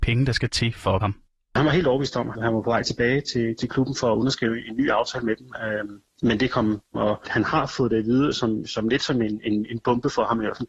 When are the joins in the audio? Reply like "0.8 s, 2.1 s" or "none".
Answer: 1.0 s, 2.3 s, 6.9 s